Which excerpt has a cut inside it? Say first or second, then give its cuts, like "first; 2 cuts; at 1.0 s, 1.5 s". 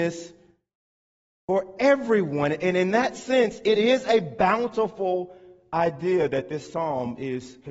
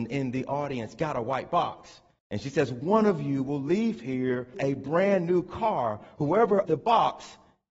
second; 3 cuts; at 2.2 s, 4.5 s, 6.6 s